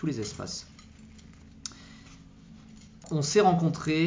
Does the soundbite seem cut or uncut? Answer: uncut